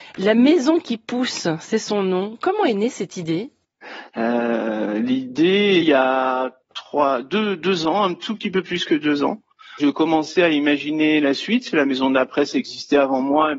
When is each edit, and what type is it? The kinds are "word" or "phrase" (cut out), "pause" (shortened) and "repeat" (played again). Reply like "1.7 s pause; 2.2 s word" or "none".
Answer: 5.8 s phrase; 9.8 s phrase